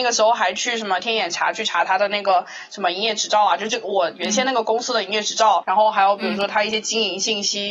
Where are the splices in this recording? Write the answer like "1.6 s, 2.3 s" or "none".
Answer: 5.6 s